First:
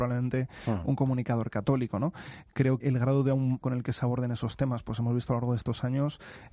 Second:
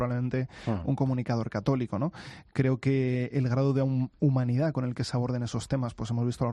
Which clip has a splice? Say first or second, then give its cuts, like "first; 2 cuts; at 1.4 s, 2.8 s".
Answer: first; 2 cuts; at 2.8 s, 3.6 s